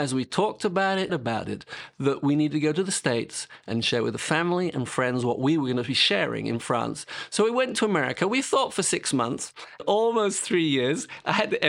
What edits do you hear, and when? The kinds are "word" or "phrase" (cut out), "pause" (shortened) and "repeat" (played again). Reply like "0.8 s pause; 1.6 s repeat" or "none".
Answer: 1.1 s word; 9.8 s phrase